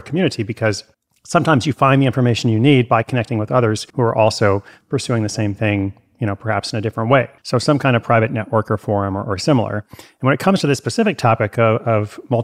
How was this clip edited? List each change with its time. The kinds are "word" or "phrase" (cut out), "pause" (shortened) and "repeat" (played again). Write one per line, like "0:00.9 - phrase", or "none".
0:00.9 - pause
0:03.9 - pause
0:07.4 - pause